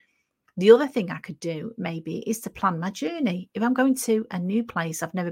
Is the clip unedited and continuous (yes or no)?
yes